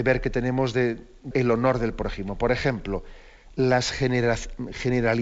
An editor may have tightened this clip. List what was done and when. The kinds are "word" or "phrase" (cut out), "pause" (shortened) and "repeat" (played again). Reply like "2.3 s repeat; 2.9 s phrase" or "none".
1.3 s word